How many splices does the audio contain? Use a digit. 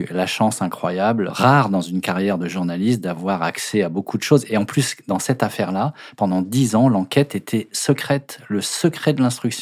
1